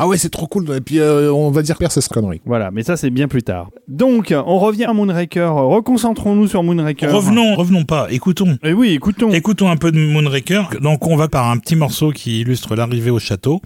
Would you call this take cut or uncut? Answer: cut